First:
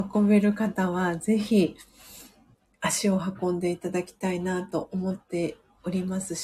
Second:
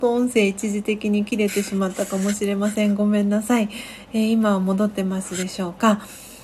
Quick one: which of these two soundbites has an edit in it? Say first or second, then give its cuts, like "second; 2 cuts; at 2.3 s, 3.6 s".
first; 1 cut; at 2.5 s